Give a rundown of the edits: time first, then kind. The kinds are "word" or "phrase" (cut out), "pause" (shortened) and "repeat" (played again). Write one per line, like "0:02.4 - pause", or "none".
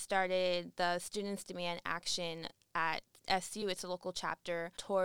none